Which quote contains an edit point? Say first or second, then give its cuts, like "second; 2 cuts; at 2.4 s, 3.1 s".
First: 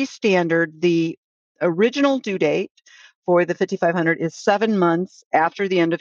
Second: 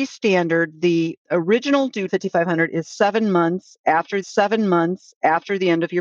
second; 3 cuts; at 1.2 s, 2.1 s, 4.2 s